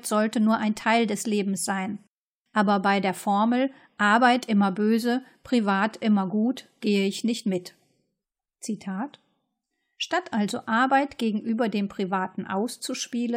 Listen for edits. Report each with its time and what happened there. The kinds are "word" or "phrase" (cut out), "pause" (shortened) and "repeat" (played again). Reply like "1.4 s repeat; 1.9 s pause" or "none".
none